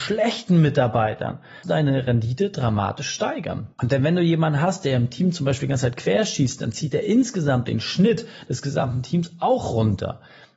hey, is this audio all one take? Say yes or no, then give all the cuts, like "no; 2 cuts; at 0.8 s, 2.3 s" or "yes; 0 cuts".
no; 2 cuts; at 1.6 s, 3.7 s